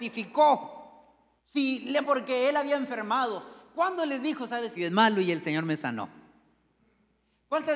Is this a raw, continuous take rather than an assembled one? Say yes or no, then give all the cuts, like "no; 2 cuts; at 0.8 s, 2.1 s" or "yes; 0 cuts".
no; 3 cuts; at 1.4 s, 2.0 s, 4.8 s